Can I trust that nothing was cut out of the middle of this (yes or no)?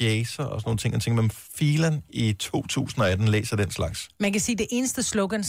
no